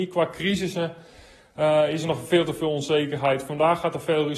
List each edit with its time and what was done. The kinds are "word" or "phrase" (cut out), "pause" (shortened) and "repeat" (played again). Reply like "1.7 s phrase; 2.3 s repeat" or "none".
none